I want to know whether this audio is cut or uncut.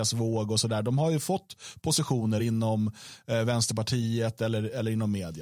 cut